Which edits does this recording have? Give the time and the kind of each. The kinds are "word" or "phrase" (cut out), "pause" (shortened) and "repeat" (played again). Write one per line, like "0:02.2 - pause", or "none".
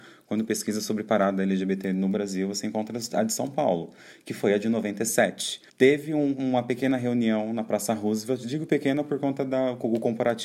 0:05.7 - pause